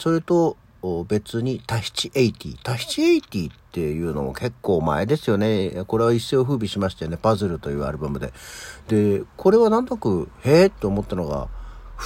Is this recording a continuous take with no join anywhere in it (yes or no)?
yes